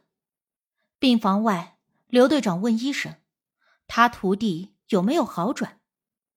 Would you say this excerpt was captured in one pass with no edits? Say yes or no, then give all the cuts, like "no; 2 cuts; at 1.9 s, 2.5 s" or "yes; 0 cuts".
yes; 0 cuts